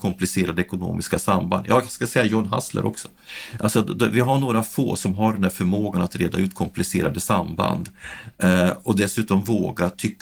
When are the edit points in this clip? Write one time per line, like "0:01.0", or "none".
none